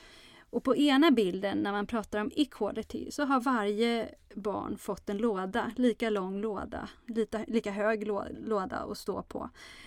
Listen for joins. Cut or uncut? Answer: uncut